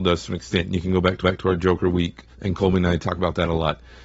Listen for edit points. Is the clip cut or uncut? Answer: cut